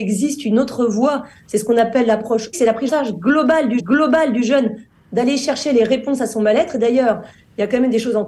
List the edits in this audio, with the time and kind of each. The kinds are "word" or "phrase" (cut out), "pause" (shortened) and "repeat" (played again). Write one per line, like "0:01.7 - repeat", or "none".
0:02.5 - word
0:02.9 - word
0:03.8 - repeat